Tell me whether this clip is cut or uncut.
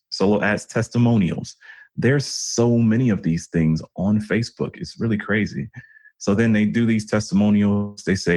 uncut